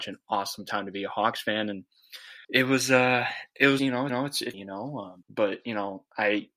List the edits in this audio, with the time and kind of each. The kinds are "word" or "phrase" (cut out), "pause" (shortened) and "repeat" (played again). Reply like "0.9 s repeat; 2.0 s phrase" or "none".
2.4 s pause; 3.8 s word; 4.1 s repeat; 4.5 s word; 5.2 s pause